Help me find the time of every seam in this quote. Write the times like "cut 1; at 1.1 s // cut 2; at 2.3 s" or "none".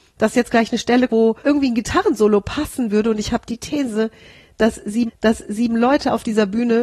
cut 1; at 1.1 s // cut 2; at 1.4 s // cut 3; at 5.1 s